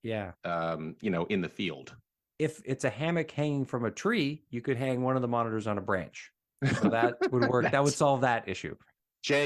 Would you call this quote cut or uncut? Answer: uncut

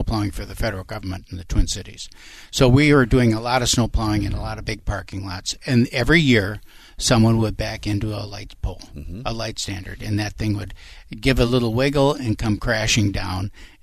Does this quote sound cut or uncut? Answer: uncut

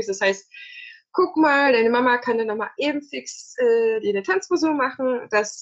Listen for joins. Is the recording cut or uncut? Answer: uncut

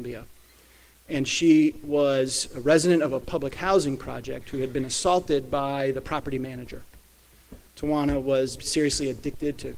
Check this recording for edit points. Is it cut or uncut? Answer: cut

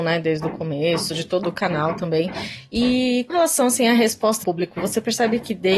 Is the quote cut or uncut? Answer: cut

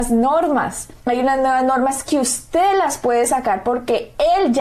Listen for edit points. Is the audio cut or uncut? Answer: cut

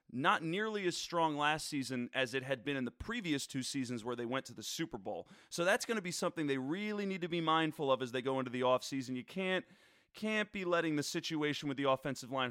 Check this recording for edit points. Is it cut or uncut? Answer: uncut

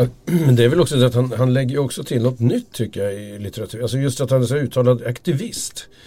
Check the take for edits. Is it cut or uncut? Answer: uncut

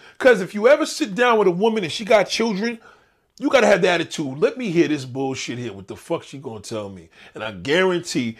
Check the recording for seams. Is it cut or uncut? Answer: uncut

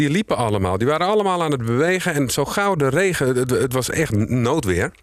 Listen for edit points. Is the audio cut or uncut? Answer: uncut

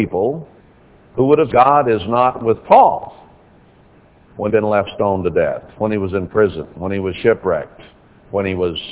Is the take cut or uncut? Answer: cut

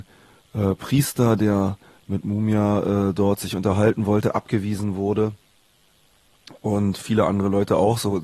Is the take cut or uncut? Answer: uncut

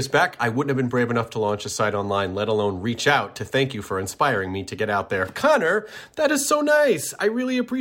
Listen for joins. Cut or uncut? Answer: uncut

